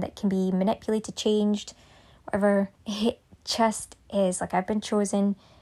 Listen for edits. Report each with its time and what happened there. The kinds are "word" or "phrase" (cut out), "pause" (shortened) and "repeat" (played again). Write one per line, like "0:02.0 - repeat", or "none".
0:02.8 - pause

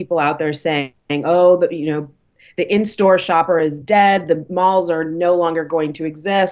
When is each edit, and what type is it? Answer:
none

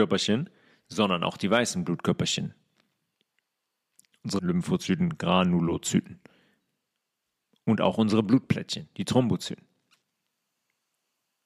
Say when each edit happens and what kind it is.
0:04.4 - phrase

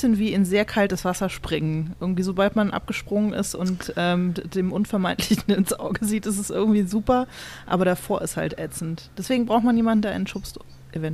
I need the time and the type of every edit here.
none

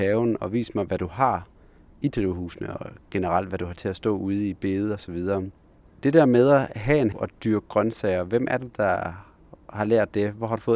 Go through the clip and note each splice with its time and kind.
0:07.1 - word

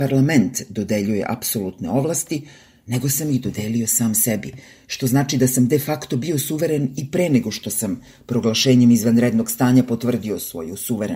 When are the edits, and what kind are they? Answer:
none

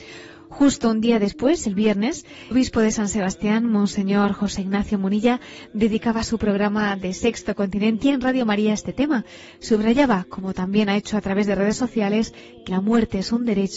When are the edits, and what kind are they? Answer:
0:02.5 - word
0:08.0 - word
0:12.7 - word

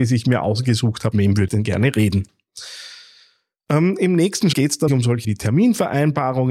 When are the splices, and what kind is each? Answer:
0:01.1 - word
0:01.5 - word
0:04.5 - word
0:04.9 - word
0:05.2 - word

